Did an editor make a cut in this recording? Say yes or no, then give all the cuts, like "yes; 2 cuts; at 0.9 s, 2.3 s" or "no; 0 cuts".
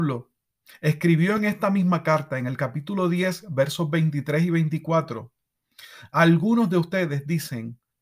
no; 0 cuts